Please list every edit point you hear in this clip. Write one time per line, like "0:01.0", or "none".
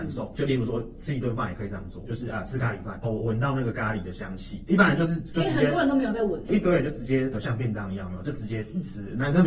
0:06.5